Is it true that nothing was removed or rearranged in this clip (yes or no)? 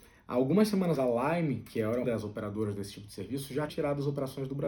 no